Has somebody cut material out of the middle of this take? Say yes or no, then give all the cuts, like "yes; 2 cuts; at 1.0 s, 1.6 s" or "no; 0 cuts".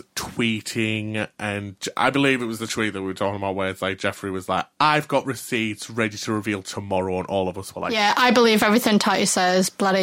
no; 0 cuts